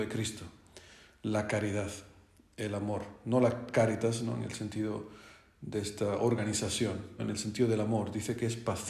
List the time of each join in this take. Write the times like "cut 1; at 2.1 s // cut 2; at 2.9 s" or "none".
cut 1; at 7.2 s